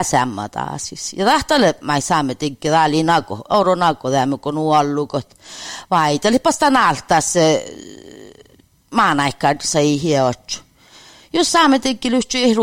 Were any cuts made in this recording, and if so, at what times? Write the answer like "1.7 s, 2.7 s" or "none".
none